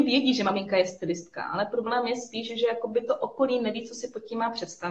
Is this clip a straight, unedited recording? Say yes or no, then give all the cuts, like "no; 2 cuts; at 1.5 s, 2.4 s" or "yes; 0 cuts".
yes; 0 cuts